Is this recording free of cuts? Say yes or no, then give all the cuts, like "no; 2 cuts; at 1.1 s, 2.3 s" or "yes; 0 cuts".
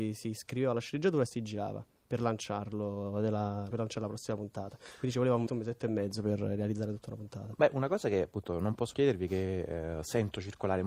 no; 3 cuts; at 3.7 s, 5.5 s, 8.9 s